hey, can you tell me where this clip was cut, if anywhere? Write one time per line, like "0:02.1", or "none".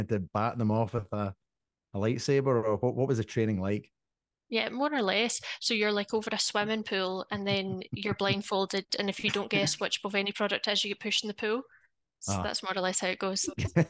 none